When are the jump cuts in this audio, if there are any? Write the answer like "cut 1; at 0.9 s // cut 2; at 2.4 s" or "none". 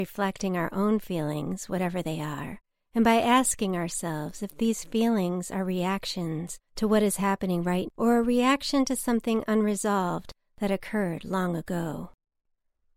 cut 1; at 7.9 s